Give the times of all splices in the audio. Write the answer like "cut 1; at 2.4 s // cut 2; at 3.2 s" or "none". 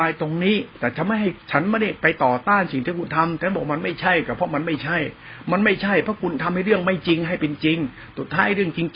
cut 1; at 1.4 s